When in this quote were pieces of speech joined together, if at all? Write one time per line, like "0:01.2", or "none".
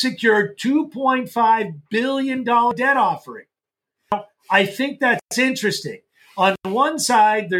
none